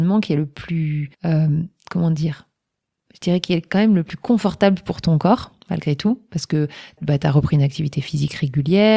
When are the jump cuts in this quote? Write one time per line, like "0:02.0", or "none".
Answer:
0:01.1
0:05.6
0:07.0